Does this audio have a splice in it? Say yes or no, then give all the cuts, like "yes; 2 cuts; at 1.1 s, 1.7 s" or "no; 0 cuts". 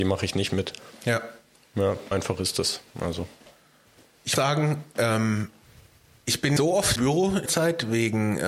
yes; 5 cuts; at 2.1 s, 4.4 s, 6.6 s, 7.0 s, 7.5 s